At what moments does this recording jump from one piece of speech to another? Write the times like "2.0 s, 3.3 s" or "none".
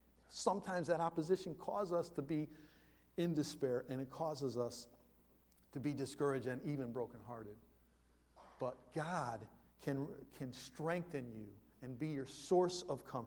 none